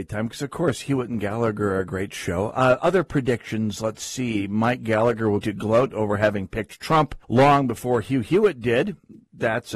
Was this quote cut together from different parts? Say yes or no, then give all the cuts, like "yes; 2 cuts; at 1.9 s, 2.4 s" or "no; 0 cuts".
yes; 2 cuts; at 5.4 s, 7.2 s